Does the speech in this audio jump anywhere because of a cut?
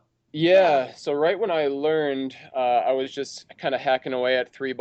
no; 0 cuts

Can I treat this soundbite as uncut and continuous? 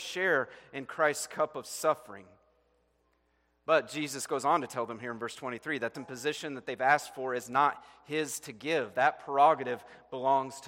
no; 1 cut; at 5.9 s

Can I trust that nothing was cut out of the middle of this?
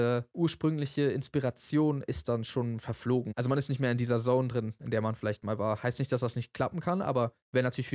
yes; 0 cuts

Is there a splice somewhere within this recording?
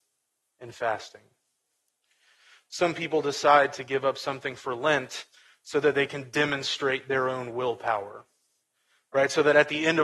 no; 0 cuts

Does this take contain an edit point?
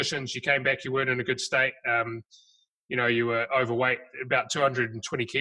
no; 0 cuts

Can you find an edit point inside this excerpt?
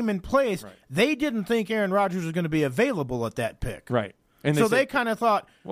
no; 0 cuts

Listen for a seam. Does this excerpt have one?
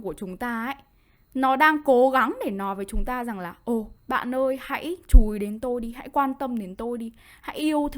yes; 1 cut; at 4.0 s

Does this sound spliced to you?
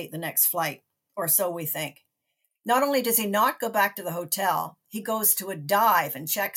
no; 0 cuts

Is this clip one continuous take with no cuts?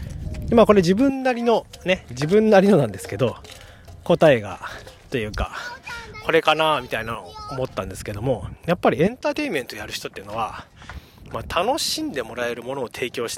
yes; 0 cuts

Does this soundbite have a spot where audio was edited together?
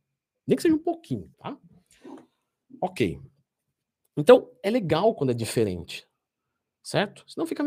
yes; 1 cut; at 1.3 s

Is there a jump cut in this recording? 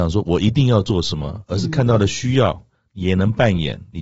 no; 0 cuts

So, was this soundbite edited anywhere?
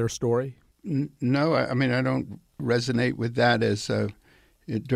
no; 0 cuts

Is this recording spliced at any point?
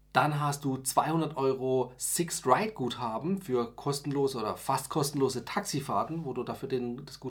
no; 0 cuts

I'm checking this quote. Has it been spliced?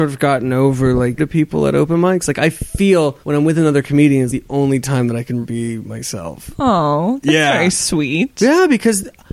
yes; 4 cuts; at 1.2 s, 3.2 s, 4.3 s, 5.4 s

